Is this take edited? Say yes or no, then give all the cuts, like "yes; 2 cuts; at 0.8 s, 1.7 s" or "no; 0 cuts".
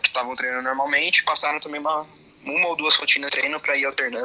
yes; 1 cut; at 3.3 s